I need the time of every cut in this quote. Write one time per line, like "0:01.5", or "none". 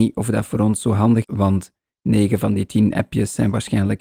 0:01.2